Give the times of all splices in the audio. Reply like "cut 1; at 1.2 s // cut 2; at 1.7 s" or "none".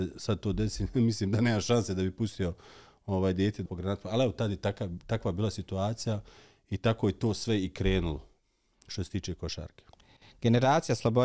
cut 1; at 3.7 s